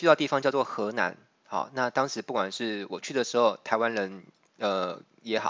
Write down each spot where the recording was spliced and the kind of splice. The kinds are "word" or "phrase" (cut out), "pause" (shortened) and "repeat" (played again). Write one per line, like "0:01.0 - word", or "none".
none

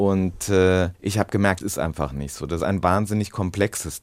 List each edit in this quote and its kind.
0:00.9 - pause
0:01.6 - word
0:02.6 - word

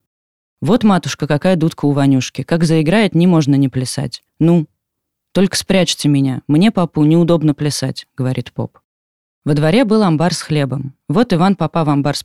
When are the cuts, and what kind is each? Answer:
0:04.3 - pause

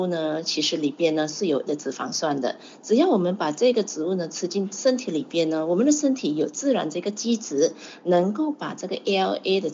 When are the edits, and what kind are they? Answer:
0:01.7 - word

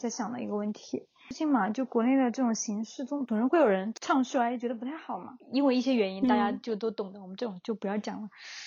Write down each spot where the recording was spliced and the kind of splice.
0:05.4 - pause

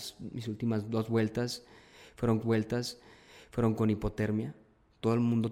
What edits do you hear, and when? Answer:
0:02.4 - repeat

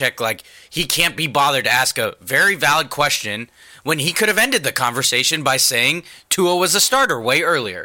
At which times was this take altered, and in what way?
none

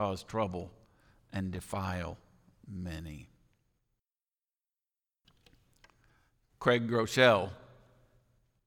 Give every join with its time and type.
none

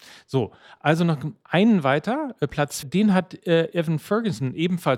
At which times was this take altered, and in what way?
0:02.8 - word

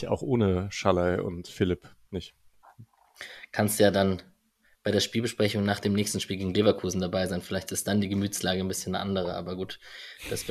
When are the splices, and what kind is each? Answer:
none

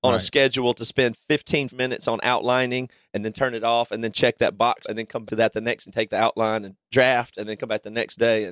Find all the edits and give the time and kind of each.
0:01.7 - word
0:04.8 - word
0:05.3 - word
0:05.9 - word

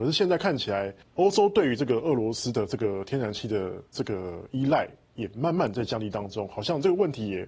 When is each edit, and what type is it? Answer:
0:01.0 - pause
0:03.9 - pause

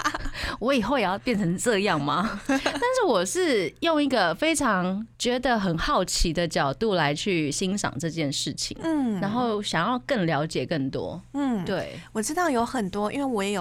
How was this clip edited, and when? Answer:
0:05.1 - pause

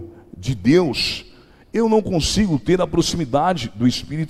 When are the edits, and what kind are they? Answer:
none

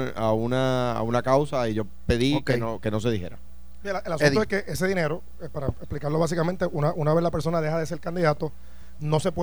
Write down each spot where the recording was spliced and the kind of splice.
none

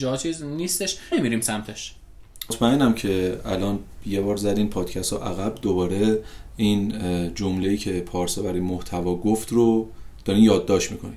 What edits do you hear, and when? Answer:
0:01.1 - phrase

